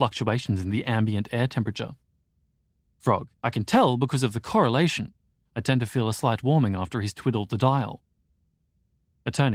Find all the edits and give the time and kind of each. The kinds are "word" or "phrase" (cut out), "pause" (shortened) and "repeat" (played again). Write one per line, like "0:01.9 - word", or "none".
0:03.4 - pause

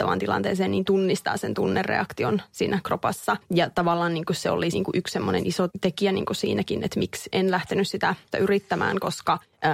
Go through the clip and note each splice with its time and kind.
0:04.7 - word
0:05.7 - word
0:07.3 - word
0:08.3 - word

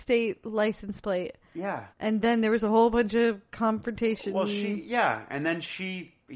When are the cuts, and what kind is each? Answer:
0:01.9 - pause

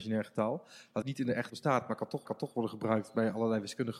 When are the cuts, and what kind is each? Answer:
0:01.0 - phrase
0:01.5 - word
0:02.3 - repeat

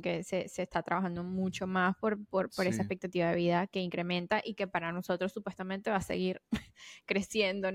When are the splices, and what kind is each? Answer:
none

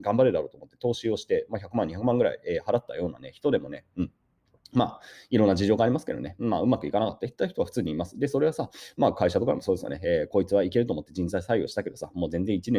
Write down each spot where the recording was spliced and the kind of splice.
none

